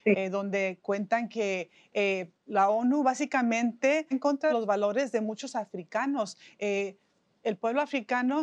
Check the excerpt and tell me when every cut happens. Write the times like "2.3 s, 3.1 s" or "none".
4.1 s, 4.5 s